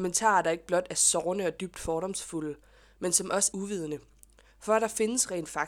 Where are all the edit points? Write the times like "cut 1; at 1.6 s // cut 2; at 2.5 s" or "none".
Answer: cut 1; at 3.5 s